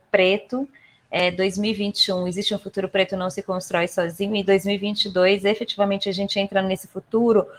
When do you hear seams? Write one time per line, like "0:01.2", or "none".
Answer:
none